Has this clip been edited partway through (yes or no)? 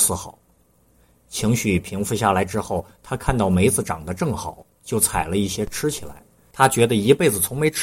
no